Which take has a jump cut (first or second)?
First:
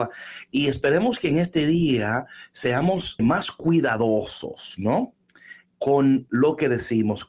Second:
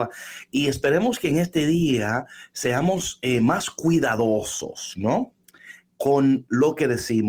first